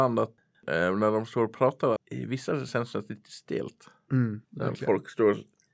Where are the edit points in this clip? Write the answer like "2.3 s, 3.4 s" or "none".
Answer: 2.0 s, 2.7 s, 4.4 s